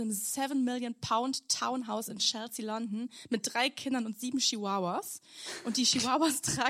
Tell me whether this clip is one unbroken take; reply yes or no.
yes